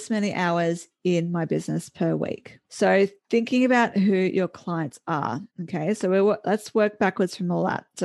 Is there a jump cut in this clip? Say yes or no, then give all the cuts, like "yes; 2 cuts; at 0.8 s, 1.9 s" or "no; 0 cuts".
yes; 2 cuts; at 2.6 s, 5.5 s